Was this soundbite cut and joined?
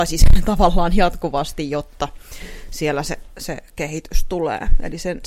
no; 0 cuts

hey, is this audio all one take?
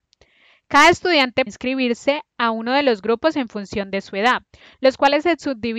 no; 1 cut; at 1.5 s

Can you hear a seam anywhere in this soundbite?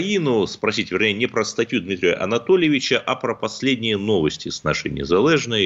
no; 0 cuts

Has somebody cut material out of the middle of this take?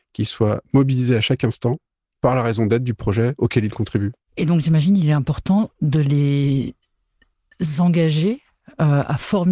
no; 0 cuts

